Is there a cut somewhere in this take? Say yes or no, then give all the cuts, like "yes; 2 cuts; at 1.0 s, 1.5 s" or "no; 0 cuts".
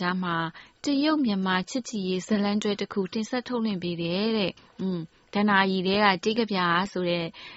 yes; 1 cut; at 4.6 s